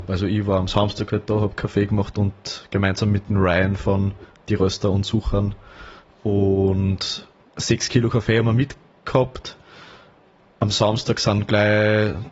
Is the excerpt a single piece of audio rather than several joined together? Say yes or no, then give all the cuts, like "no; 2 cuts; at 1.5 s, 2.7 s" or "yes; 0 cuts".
yes; 0 cuts